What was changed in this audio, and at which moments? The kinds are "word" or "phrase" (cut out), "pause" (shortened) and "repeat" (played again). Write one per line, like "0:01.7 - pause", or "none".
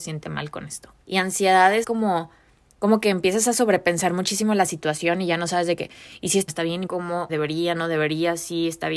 0:01.0 - pause
0:01.8 - word
0:06.5 - phrase
0:06.9 - phrase
0:07.3 - word
0:07.8 - word